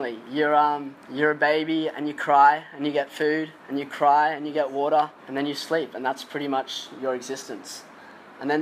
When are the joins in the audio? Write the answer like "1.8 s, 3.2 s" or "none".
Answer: 1.0 s, 3.6 s, 5.2 s

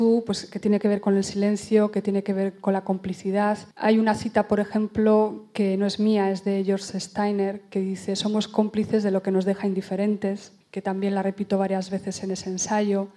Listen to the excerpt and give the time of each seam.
3.7 s, 10.6 s

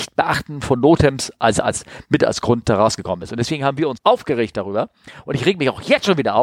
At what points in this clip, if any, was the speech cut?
4.0 s

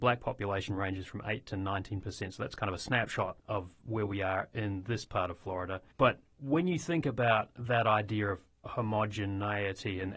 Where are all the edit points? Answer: 3.4 s, 5.9 s

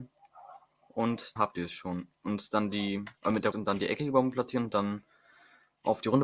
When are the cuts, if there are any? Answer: 1.4 s, 3.2 s, 3.5 s

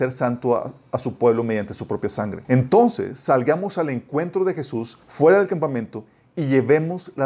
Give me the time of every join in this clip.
2.4 s, 5.0 s

